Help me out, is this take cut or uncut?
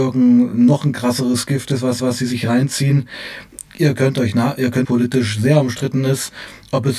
cut